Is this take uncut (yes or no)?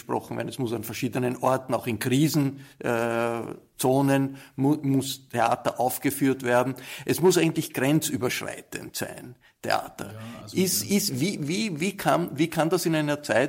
yes